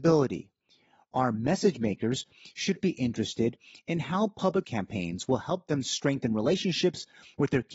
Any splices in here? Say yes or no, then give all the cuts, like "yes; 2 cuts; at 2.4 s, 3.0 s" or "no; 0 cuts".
yes; 2 cuts; at 2.8 s, 4.6 s